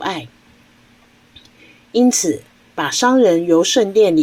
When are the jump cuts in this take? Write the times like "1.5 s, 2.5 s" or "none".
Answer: none